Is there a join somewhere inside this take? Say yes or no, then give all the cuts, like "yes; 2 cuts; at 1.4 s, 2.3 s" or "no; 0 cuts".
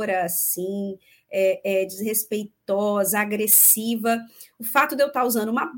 no; 0 cuts